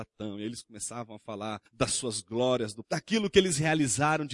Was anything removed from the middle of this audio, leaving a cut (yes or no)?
yes